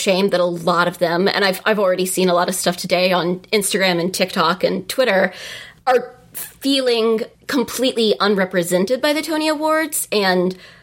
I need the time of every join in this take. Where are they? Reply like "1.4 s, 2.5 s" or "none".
7.4 s